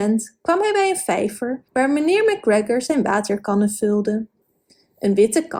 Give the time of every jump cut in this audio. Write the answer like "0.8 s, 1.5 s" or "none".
1.7 s